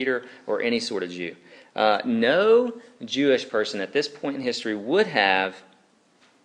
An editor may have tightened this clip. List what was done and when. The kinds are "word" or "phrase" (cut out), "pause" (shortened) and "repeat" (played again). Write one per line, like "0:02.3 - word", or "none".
none